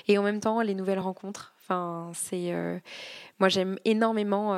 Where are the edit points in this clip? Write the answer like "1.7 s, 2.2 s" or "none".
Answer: none